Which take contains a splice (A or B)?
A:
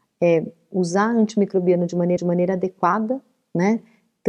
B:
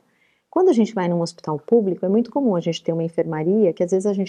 A